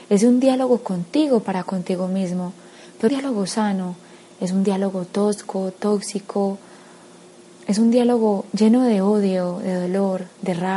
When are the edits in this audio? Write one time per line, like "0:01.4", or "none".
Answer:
0:03.1